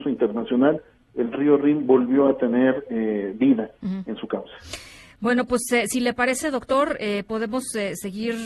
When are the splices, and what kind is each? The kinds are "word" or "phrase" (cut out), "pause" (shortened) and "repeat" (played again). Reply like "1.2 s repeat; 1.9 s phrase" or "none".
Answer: none